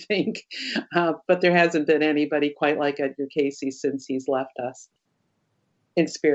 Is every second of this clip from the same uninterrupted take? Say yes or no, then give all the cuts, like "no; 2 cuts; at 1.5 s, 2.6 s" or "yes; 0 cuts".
yes; 0 cuts